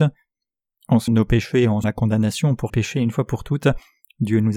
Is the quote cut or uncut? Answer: cut